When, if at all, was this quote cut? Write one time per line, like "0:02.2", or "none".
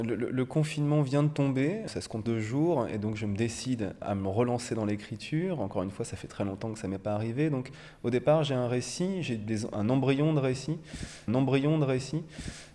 0:01.9
0:02.3
0:04.0
0:11.3